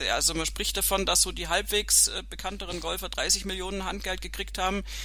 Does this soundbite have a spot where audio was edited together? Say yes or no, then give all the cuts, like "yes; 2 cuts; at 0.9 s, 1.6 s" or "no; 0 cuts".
no; 0 cuts